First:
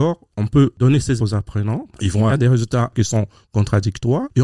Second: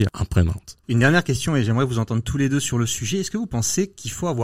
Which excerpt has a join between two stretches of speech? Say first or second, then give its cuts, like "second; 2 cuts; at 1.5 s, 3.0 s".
first; 2 cuts; at 1.2 s, 2.3 s